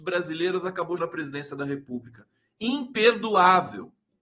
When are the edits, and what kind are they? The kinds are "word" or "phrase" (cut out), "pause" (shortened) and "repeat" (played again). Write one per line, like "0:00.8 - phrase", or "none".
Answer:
0:01.0 - word